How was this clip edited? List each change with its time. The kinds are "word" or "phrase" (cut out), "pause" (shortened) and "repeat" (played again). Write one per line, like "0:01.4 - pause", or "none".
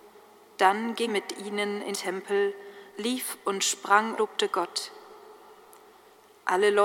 0:01.1 - word
0:01.9 - word
0:02.9 - pause
0:04.2 - phrase